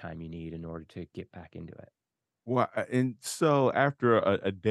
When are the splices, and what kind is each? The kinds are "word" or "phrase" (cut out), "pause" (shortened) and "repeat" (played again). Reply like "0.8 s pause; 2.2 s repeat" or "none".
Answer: 2.1 s pause